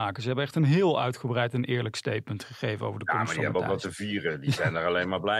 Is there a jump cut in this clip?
no; 0 cuts

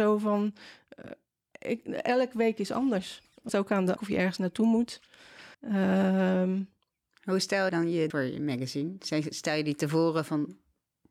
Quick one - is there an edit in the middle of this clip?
yes; 5 cuts; at 3.5 s, 4.0 s, 5.5 s, 7.7 s, 8.1 s

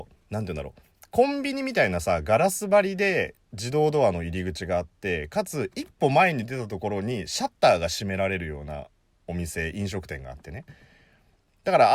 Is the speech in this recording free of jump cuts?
yes; 0 cuts

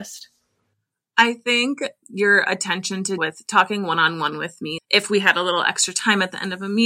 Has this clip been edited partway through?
yes; 3 cuts; at 2.0 s, 3.2 s, 4.8 s

